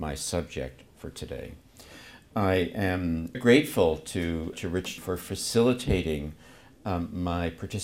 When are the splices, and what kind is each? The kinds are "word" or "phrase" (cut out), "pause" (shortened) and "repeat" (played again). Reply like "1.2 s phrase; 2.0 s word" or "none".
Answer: 3.3 s word; 4.5 s word; 5.0 s word

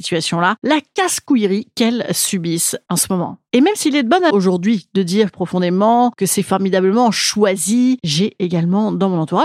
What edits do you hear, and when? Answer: 4.3 s word; 5.3 s phrase

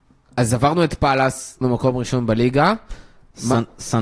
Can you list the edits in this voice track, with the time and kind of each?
1.6 s word

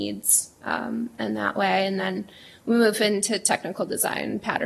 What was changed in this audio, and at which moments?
none

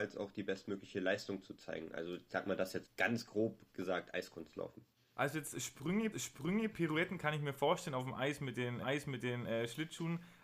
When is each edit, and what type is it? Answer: 2.8 s word; 6.1 s repeat; 8.8 s repeat

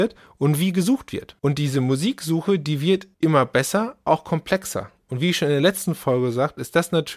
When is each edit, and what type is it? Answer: 1.4 s pause; 3.1 s pause; 4.1 s word

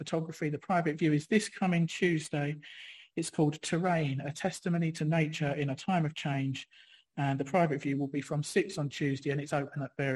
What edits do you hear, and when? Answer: none

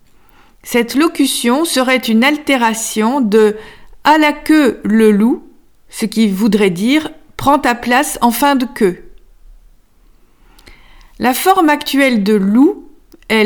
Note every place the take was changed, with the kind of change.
none

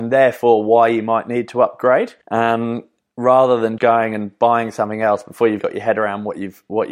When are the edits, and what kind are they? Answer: 2.2 s pause; 3.8 s word; 5.6 s word

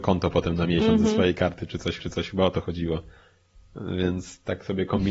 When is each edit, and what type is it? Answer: 2.0 s repeat

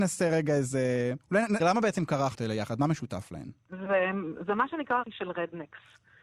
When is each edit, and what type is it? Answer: 1.6 s word; 2.4 s phrase; 5.0 s word

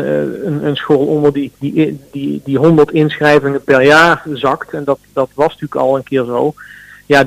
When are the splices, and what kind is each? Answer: 1.6 s pause

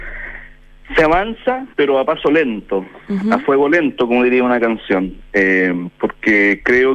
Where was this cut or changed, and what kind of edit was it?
1.7 s pause

